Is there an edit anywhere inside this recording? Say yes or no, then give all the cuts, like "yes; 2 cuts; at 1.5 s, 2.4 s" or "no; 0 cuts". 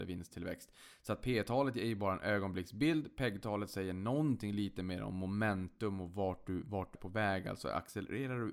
yes; 1 cut; at 6.9 s